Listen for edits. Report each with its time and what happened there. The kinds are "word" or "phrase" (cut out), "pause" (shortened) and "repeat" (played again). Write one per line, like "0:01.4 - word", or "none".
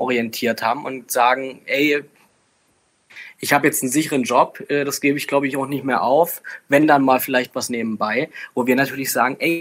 none